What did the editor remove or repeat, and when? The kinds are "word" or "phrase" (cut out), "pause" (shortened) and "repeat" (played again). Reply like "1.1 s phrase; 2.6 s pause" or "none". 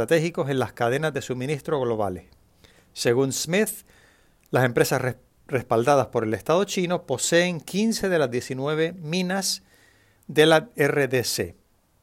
none

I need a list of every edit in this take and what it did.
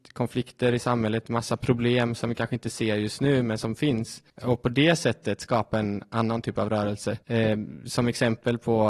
4.3 s pause; 7.2 s pause

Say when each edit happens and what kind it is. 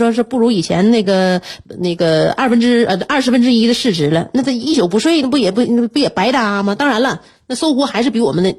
1.7 s pause

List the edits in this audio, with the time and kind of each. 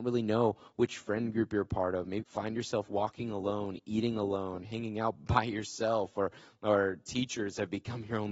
2.2 s word

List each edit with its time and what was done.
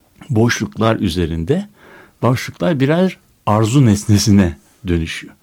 none

